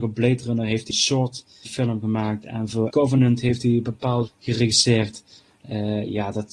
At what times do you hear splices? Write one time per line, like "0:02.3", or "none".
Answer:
0:00.9
0:01.6
0:02.9
0:04.3